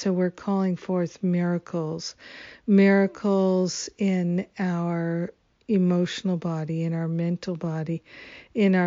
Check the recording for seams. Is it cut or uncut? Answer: uncut